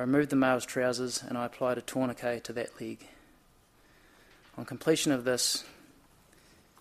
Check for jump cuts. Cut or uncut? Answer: uncut